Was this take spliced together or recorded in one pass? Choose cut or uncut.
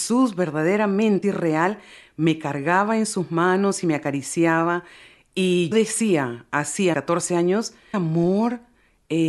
cut